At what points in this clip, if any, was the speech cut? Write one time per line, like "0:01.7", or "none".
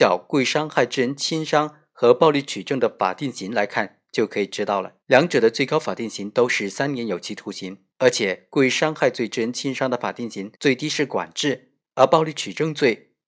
0:05.0
0:07.9
0:10.5
0:11.8